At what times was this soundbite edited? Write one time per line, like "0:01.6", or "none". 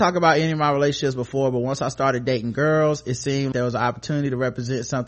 0:03.5